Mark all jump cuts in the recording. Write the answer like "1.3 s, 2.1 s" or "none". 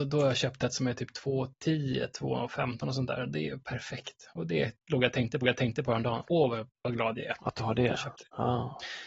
5.4 s